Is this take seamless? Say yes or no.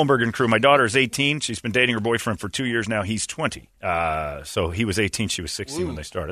no